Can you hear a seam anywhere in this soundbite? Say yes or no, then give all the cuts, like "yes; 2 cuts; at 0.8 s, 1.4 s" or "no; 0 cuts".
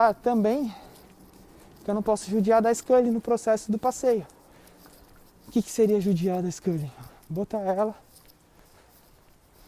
no; 0 cuts